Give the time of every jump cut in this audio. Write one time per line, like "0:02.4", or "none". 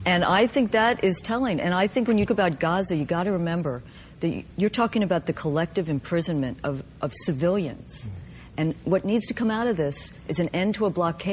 0:02.3